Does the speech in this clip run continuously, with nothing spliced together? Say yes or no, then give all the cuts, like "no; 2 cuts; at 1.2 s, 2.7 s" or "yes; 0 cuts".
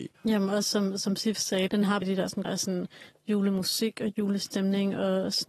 no; 3 cuts; at 1.7 s, 2.0 s, 2.4 s